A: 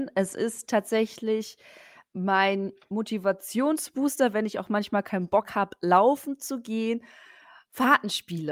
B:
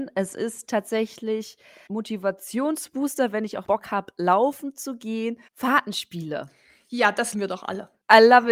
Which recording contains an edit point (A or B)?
B